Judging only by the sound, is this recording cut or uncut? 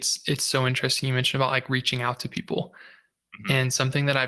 uncut